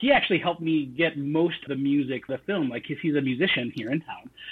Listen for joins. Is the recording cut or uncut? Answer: cut